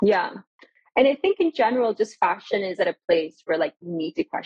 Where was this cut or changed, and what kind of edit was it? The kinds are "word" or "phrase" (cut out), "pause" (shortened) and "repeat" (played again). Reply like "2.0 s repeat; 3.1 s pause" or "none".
none